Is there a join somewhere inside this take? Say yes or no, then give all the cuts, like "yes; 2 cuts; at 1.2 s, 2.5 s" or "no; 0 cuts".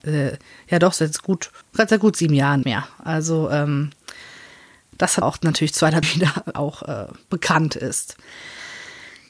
yes; 5 cuts; at 1.6 s, 2.6 s, 5.2 s, 6.0 s, 6.5 s